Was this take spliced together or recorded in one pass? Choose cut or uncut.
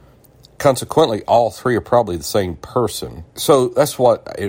cut